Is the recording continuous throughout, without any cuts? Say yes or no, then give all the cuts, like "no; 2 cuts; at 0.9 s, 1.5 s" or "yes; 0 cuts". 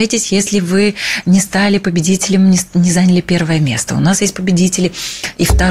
yes; 0 cuts